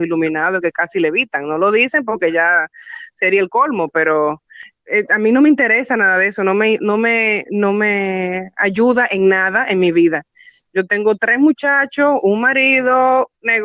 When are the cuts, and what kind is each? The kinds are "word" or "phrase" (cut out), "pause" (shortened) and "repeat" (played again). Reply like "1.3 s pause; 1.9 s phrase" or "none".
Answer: none